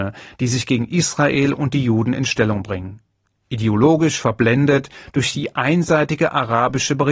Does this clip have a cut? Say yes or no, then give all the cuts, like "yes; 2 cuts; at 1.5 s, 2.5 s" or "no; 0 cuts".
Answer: no; 0 cuts